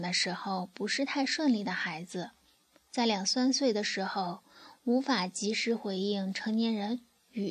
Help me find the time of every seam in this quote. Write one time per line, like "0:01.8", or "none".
none